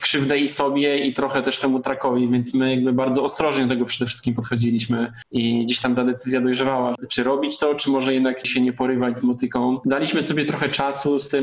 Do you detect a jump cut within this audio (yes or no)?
yes